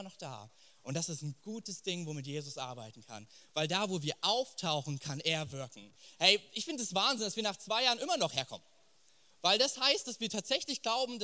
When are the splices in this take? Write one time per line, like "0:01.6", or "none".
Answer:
none